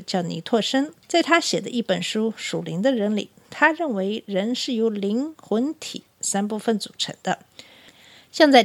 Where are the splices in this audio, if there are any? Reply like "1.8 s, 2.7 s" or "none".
1.0 s